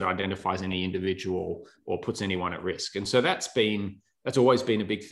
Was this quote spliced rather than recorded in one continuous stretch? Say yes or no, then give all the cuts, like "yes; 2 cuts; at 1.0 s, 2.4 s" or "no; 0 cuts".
no; 0 cuts